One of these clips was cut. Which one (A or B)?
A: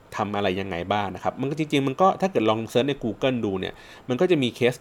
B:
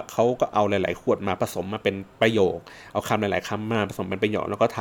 B